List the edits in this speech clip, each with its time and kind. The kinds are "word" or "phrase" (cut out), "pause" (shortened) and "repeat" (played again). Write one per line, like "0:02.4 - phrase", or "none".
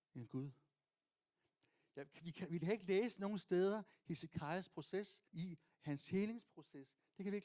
0:05.3 - pause